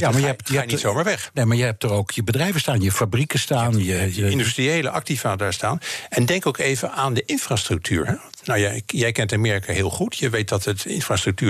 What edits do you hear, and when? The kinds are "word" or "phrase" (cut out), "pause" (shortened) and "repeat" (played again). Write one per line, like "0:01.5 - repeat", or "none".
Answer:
none